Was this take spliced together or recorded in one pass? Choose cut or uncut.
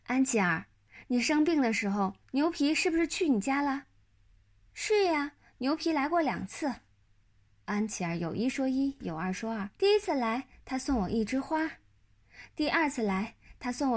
cut